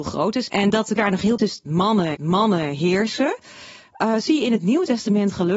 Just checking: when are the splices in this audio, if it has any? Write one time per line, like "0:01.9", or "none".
0:01.0
0:01.4
0:02.1